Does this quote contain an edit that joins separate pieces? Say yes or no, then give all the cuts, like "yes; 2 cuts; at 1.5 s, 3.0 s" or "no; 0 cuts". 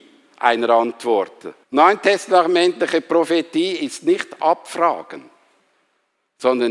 yes; 1 cut; at 1.6 s